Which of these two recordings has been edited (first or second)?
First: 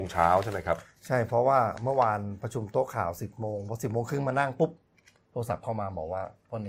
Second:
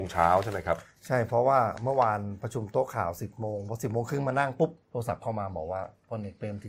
second